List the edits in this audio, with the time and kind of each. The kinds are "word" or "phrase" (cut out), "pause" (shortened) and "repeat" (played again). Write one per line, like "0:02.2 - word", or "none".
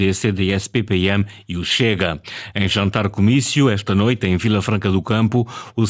none